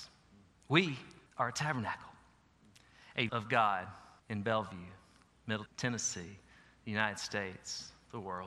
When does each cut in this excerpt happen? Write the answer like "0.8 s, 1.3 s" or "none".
1.3 s, 3.3 s, 4.2 s, 5.3 s, 5.7 s